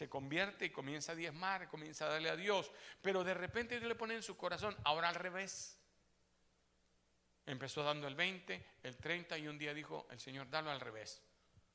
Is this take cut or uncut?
uncut